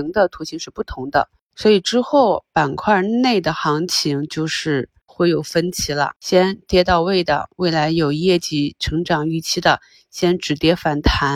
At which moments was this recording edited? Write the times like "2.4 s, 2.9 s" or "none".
6.2 s